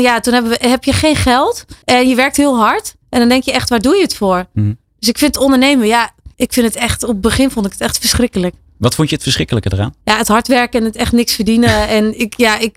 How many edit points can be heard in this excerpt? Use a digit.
4